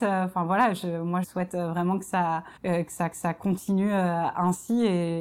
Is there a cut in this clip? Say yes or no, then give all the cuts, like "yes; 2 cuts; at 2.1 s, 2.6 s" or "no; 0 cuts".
yes; 3 cuts; at 1.2 s, 2.6 s, 3.1 s